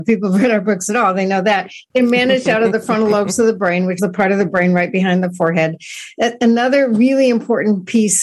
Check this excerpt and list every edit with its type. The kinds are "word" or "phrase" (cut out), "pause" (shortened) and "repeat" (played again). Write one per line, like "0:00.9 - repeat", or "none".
0:04.0 - word